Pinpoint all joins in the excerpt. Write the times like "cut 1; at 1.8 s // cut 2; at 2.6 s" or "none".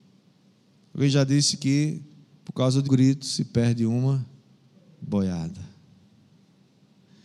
cut 1; at 2.9 s

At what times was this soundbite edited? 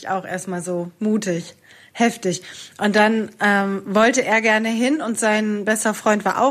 none

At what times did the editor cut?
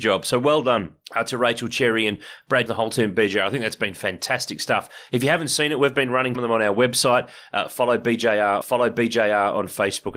cut 1; at 1.0 s // cut 2; at 2.7 s // cut 3; at 6.3 s // cut 4; at 8.6 s

